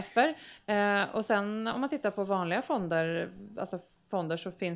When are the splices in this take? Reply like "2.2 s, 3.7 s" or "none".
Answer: none